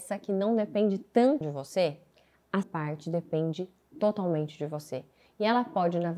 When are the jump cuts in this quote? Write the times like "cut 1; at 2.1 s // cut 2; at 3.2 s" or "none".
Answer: cut 1; at 1.4 s // cut 2; at 2.6 s